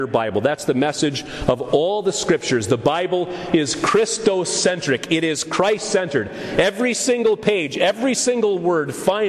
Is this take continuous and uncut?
yes; 0 cuts

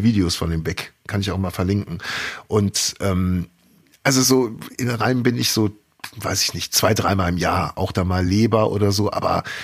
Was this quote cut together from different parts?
no; 0 cuts

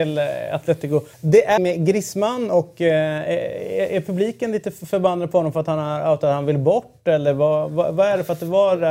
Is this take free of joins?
no; 2 cuts; at 1.1 s, 1.6 s

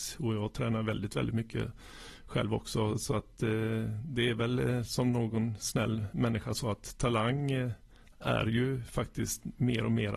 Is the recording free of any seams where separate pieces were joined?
yes; 0 cuts

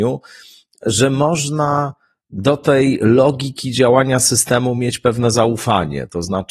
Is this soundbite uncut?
yes; 0 cuts

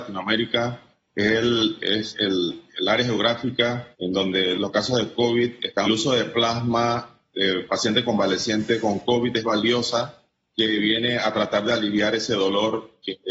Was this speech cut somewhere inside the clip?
yes; 4 cuts; at 3.9 s, 4.5 s, 5.8 s, 9.4 s

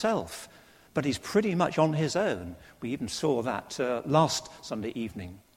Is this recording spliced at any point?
no; 0 cuts

